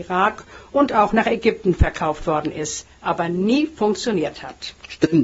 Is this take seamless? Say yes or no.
yes